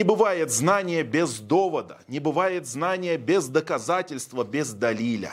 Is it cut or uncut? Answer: uncut